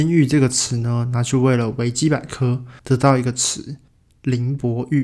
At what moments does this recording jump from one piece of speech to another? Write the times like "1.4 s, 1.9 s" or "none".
2.8 s, 3.9 s